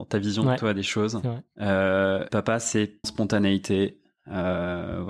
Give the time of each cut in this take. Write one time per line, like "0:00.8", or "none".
0:02.3
0:03.0